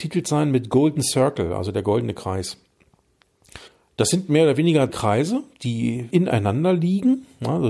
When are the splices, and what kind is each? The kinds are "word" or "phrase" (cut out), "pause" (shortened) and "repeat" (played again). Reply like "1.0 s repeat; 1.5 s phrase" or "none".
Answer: 3.7 s pause; 4.9 s word; 6.1 s word